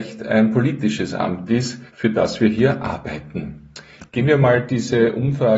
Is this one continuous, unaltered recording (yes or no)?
no